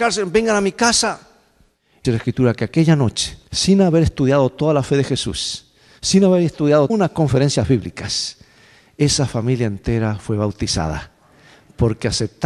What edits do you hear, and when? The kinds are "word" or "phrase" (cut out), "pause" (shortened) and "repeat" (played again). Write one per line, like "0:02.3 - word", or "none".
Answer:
0:02.0 - word
0:03.5 - pause
0:06.9 - word